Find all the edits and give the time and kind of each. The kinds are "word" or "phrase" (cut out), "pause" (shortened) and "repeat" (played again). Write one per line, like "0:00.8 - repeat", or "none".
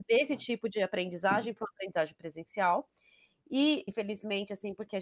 0:03.9 - word